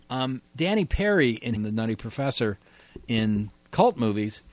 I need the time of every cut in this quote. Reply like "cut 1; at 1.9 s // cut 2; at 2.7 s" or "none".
cut 1; at 1.6 s